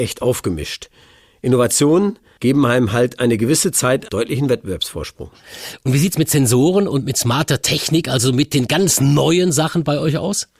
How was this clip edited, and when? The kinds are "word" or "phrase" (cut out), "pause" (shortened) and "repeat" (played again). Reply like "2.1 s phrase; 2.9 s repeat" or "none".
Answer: none